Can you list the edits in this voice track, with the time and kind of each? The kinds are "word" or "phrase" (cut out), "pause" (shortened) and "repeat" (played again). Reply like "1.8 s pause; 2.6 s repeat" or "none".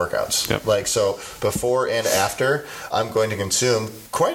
2.9 s word